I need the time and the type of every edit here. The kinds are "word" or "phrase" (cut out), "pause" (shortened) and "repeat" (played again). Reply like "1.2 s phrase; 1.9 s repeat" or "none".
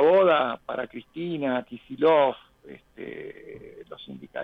none

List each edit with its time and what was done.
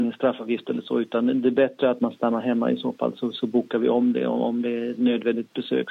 none

